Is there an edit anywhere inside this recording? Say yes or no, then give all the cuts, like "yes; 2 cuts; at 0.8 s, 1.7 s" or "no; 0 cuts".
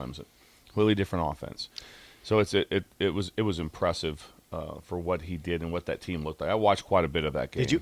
no; 0 cuts